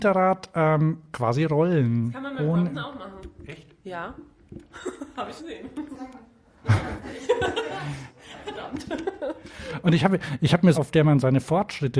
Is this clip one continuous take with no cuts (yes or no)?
no